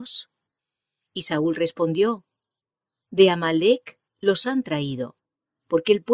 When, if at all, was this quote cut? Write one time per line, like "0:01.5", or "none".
none